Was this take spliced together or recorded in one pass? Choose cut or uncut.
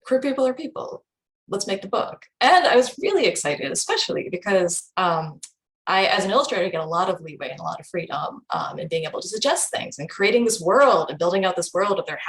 uncut